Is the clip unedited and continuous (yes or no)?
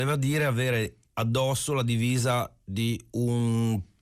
no